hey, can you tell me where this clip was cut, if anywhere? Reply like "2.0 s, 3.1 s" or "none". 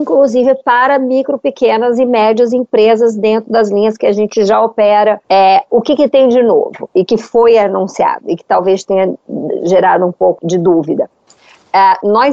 5.2 s, 10.4 s